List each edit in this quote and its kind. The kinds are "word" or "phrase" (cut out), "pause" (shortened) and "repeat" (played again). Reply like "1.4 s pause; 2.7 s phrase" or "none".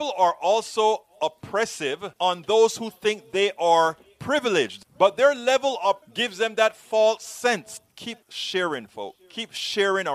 2.2 s pause; 6.0 s word; 8.2 s pause